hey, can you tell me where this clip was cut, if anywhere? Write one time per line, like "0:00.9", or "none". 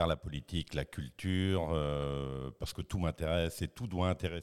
none